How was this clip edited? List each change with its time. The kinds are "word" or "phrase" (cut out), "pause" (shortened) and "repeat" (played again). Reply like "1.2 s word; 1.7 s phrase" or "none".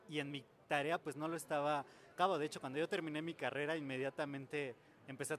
1.0 s word; 2.1 s word